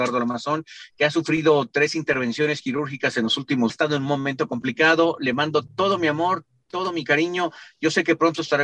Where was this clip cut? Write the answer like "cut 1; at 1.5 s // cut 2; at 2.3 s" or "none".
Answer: cut 1; at 3.7 s

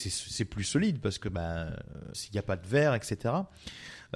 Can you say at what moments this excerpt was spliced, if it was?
cut 1; at 2.1 s

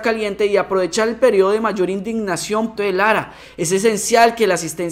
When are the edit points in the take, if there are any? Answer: cut 1; at 2.8 s

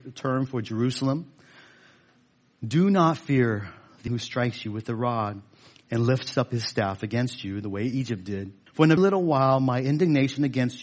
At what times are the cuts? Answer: cut 1; at 4.1 s // cut 2; at 8.7 s // cut 3; at 9.0 s

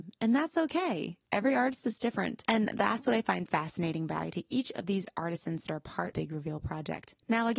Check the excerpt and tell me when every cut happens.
cut 1; at 3.5 s // cut 2; at 4.3 s // cut 3; at 6.1 s

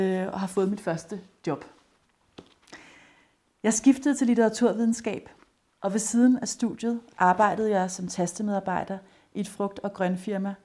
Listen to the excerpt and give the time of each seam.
none

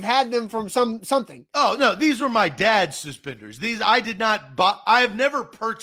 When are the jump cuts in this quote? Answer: none

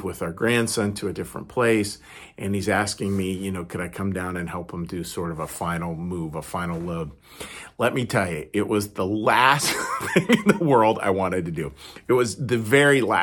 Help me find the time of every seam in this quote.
none

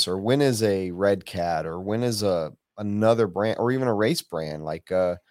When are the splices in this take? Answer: none

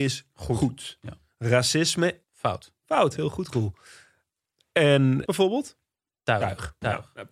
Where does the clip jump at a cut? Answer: cut 1; at 2.2 s // cut 2; at 5.3 s

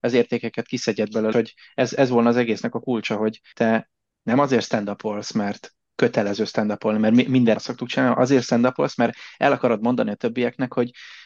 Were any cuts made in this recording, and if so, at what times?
cut 1; at 1.3 s // cut 2; at 7.6 s

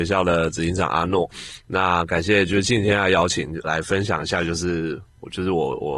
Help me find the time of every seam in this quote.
cut 1; at 3.6 s

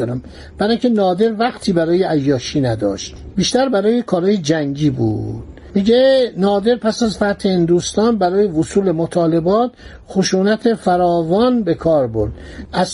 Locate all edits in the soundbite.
none

